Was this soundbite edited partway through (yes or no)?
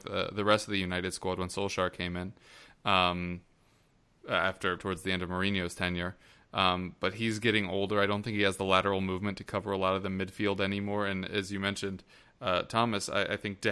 yes